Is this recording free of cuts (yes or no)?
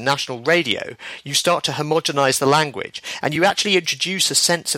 yes